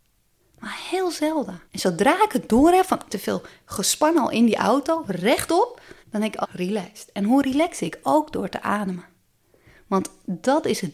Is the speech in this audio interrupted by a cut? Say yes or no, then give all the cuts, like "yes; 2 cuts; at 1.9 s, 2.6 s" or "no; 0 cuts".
yes; 4 cuts; at 1.6 s, 3.1 s, 6.0 s, 6.4 s